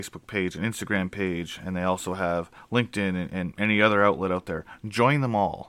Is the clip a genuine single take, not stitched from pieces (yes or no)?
yes